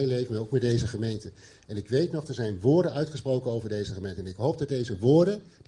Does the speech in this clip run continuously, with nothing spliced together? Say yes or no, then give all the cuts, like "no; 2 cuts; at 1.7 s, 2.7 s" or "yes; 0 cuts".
yes; 0 cuts